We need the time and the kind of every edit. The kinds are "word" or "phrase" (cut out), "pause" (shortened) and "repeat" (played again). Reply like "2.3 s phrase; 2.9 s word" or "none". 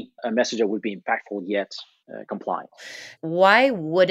none